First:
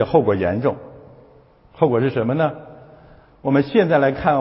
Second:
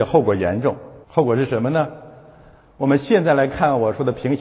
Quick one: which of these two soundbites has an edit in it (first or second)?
second